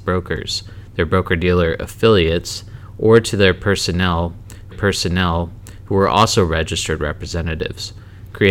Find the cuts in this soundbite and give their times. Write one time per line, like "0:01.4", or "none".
0:04.7